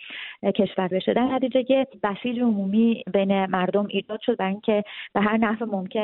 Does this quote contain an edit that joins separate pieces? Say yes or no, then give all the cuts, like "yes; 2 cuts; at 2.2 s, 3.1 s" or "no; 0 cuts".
yes; 1 cut; at 0.9 s